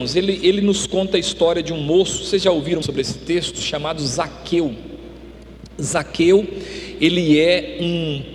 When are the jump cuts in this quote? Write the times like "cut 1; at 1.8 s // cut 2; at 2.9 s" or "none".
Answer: cut 1; at 2.8 s